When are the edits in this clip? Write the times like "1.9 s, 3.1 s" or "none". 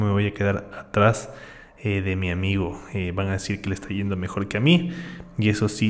none